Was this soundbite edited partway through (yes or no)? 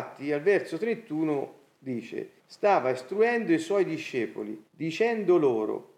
yes